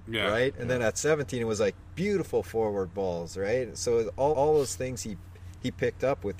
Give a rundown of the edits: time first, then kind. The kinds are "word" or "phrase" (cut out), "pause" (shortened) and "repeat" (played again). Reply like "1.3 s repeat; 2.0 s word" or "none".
4.3 s repeat